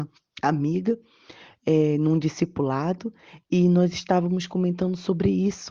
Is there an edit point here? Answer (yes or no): no